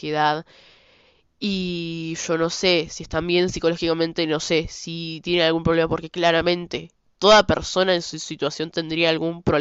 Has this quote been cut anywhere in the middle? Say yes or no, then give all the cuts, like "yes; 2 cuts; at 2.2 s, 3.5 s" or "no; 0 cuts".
no; 0 cuts